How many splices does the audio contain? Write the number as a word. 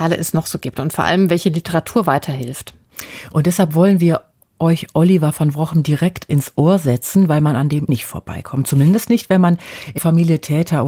two